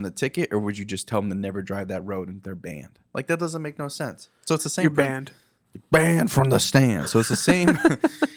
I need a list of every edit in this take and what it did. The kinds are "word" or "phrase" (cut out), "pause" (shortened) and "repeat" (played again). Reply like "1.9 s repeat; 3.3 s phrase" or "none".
none